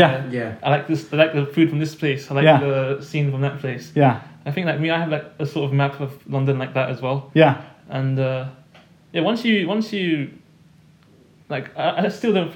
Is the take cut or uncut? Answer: uncut